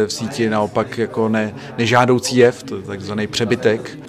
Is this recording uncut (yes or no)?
yes